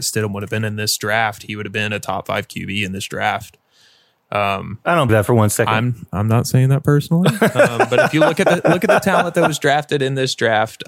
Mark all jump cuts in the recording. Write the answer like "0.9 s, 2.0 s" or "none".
5.1 s